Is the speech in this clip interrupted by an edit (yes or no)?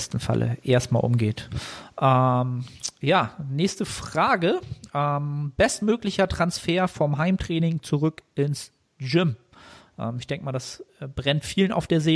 no